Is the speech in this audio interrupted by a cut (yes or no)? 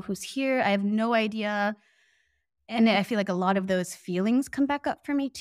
no